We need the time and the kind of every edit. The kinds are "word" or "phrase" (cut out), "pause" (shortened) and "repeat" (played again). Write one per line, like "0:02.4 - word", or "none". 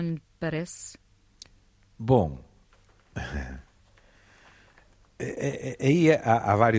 none